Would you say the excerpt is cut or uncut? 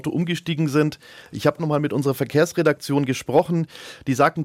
cut